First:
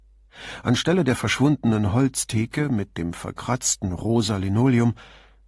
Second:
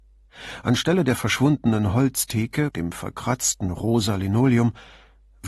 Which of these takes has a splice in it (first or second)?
second